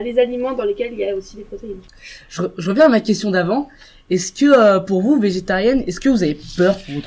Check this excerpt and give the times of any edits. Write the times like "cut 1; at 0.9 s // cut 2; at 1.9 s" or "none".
none